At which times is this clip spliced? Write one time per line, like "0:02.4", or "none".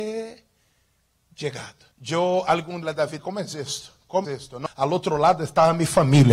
0:01.9
0:02.8
0:03.2
0:04.2
0:04.7